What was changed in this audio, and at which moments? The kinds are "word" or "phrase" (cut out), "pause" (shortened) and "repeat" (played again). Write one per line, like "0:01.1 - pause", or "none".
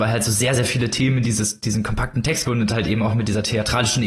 0:02.4 - word